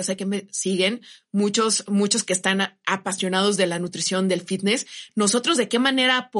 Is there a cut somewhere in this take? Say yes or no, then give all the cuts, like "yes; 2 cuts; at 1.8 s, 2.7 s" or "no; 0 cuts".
no; 0 cuts